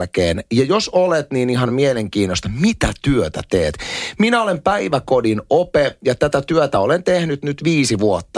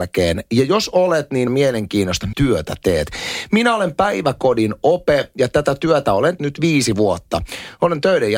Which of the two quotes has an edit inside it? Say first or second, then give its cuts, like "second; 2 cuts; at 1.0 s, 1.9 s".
second; 3 cuts; at 1.5 s, 2.3 s, 6.4 s